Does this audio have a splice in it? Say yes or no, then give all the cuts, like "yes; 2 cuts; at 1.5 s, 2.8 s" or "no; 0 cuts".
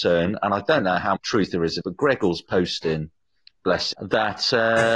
yes; 3 cuts; at 1.1 s, 1.8 s, 3.9 s